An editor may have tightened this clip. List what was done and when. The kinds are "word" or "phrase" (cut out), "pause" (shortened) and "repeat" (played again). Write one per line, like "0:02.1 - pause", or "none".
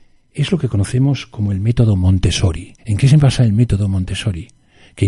0:02.8 - pause